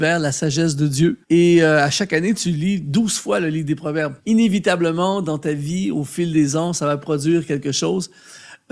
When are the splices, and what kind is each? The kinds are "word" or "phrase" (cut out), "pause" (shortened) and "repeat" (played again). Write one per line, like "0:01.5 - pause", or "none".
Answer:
0:01.2 - pause
0:04.2 - pause